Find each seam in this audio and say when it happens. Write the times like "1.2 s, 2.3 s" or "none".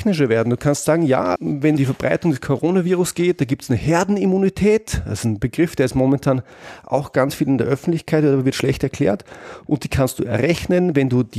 1.4 s, 1.8 s